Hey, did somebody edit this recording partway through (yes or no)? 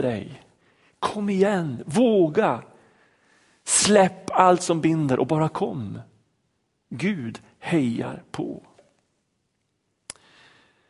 no